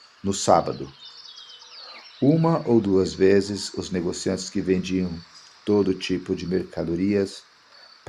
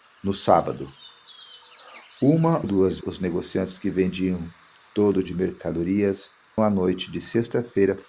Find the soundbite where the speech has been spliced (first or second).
second